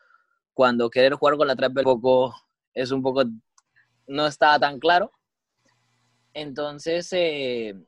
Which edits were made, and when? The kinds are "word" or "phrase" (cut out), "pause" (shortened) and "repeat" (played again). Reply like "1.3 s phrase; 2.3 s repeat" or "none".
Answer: 1.8 s phrase